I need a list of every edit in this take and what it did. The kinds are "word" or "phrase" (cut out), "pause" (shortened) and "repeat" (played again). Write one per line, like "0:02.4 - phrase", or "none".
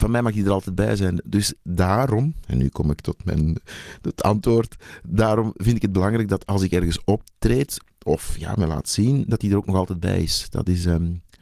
none

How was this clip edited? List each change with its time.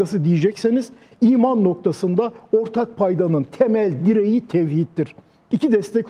none

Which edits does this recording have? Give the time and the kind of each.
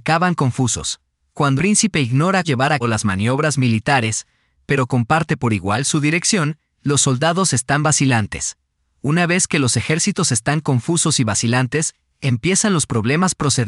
0:01.6 - word
0:02.4 - word
0:02.8 - word

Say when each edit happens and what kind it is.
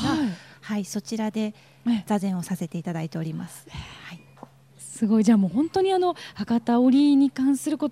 none

